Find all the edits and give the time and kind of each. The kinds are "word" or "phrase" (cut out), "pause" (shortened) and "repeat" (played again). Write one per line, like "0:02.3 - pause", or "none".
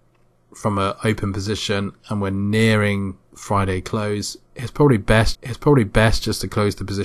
0:03.2 - pause
0:05.3 - repeat